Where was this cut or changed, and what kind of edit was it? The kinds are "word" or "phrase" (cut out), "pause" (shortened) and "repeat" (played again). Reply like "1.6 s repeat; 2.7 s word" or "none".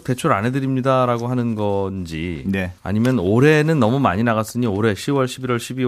2.8 s pause